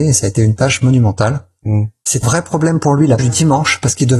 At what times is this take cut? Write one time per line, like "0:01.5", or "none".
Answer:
0:02.2
0:03.2